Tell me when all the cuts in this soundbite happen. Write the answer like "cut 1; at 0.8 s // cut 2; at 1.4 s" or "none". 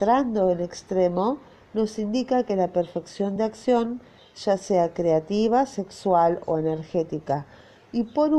none